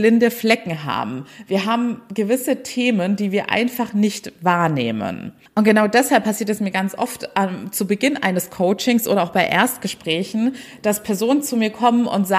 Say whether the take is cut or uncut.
cut